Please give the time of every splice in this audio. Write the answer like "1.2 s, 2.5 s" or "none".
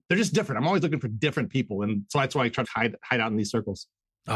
2.6 s